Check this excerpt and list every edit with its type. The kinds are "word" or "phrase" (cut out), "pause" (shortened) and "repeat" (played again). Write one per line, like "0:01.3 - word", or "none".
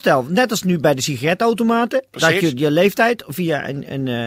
none